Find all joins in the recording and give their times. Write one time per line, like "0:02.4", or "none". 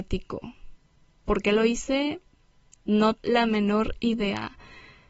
0:03.2